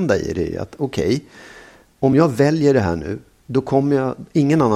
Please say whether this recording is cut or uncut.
uncut